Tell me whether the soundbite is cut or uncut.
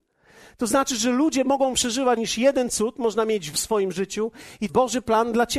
cut